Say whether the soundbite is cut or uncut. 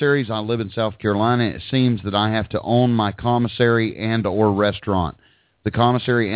uncut